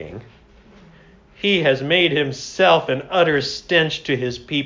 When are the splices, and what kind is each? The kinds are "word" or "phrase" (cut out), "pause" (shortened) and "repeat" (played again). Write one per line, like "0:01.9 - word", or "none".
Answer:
none